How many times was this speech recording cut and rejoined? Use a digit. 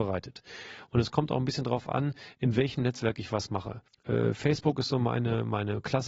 1